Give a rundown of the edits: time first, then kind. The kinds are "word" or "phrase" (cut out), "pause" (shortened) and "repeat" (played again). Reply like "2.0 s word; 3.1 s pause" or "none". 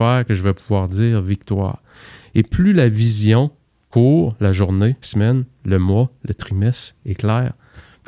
5.0 s word; 7.0 s word